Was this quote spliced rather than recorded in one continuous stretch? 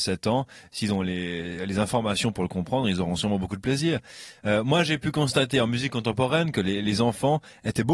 no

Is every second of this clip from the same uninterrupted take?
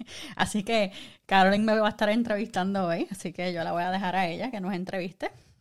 yes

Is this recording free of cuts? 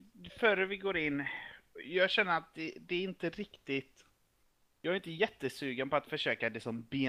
yes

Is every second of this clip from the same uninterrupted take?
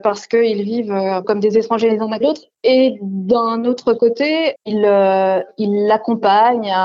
no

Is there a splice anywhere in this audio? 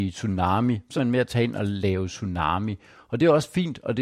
yes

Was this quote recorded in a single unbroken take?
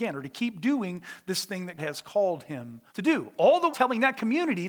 no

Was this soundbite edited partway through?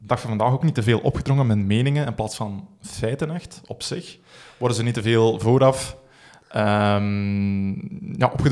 no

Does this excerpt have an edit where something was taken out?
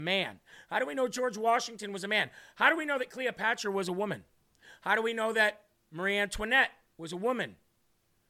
no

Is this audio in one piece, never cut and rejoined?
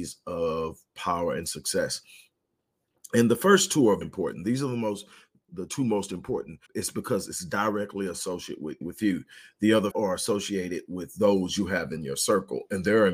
no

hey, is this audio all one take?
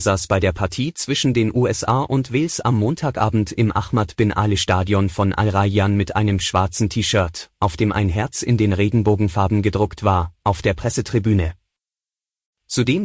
yes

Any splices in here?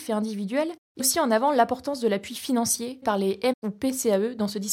yes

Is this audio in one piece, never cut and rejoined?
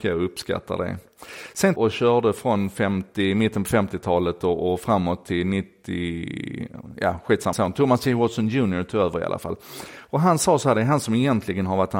no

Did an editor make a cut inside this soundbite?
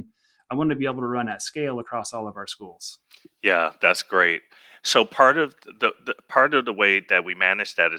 no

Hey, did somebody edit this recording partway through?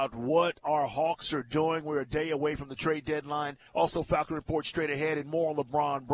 yes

